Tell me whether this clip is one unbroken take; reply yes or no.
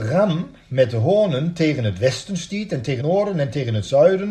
no